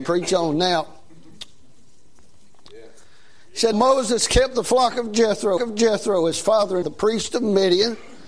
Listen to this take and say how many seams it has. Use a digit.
3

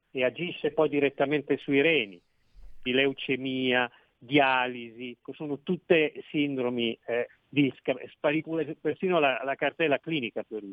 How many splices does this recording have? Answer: 4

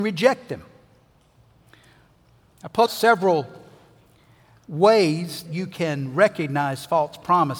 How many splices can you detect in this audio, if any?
2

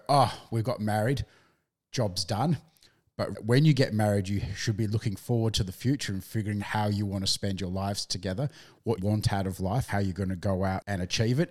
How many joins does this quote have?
4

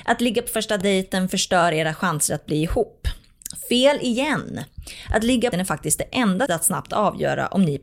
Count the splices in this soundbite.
2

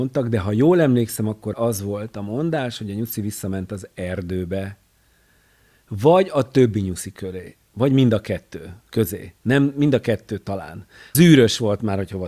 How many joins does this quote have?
0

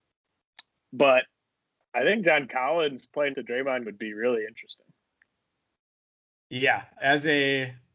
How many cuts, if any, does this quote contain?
3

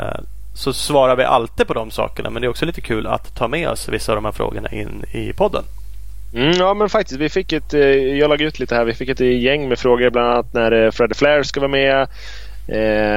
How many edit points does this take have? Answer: 1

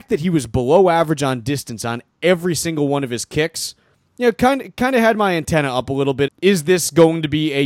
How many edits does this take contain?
1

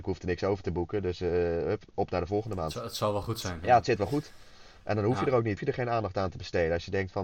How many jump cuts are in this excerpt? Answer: 2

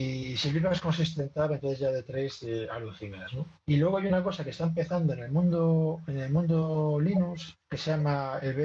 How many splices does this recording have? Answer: 1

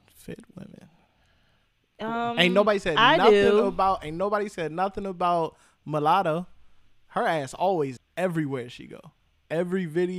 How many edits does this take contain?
1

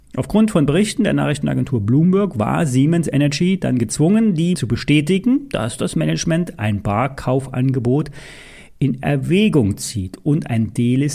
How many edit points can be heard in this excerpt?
1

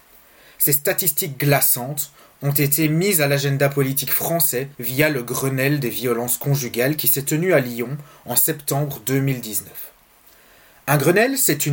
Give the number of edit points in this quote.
1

